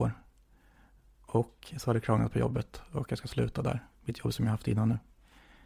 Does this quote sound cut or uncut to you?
cut